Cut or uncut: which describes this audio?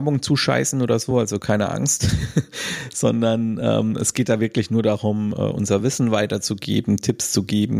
uncut